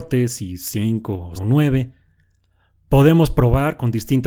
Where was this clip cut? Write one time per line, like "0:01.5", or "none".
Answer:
0:01.3